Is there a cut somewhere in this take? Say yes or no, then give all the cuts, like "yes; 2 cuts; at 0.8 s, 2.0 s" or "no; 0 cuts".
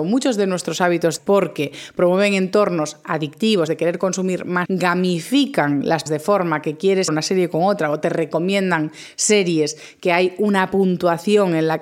yes; 5 cuts; at 1.2 s, 3.7 s, 4.6 s, 6.1 s, 7.1 s